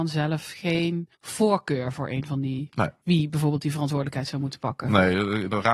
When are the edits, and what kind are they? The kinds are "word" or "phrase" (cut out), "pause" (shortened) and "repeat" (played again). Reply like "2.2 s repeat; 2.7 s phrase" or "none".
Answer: 1.1 s pause